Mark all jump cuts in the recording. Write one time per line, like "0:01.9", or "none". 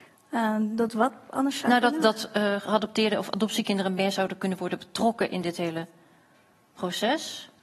none

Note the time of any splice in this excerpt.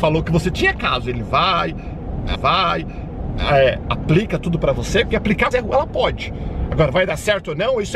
0:02.3
0:05.5

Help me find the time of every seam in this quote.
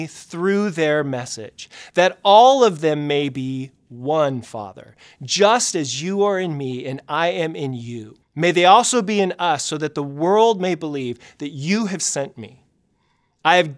0:08.2

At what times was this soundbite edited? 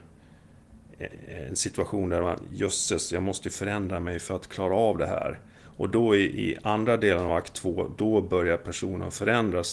none

